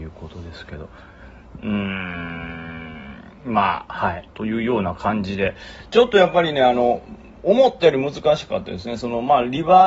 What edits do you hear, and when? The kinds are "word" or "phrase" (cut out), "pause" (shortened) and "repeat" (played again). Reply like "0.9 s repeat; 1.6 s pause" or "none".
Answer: 4.3 s pause